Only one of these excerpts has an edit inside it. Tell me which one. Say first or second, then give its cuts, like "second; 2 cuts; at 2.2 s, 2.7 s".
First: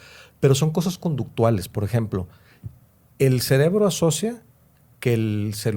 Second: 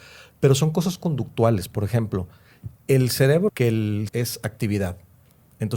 second; 3 cuts; at 2.8 s, 3.5 s, 4.1 s